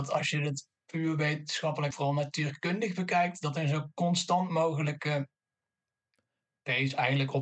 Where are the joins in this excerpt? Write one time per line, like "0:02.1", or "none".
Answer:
0:01.9